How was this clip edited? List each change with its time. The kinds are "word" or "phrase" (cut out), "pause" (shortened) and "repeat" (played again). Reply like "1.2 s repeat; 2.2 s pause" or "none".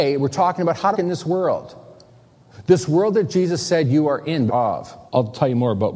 0.9 s word; 4.5 s phrase; 5.1 s pause